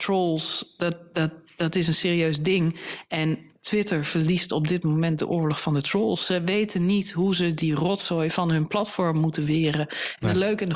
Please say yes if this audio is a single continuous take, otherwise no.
no